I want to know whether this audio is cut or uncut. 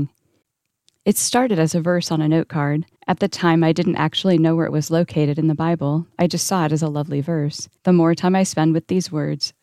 cut